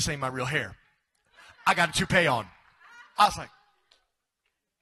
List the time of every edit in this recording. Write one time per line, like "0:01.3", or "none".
none